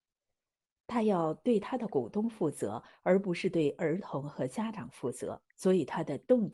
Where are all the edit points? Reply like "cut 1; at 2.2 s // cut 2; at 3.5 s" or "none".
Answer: cut 1; at 5.5 s